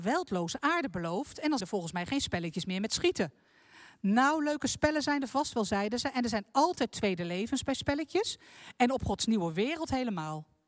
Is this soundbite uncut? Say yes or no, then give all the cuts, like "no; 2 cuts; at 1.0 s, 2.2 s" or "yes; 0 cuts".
no; 1 cut; at 1.6 s